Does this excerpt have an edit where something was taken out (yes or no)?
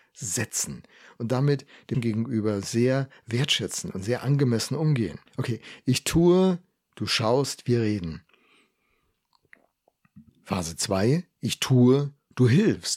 yes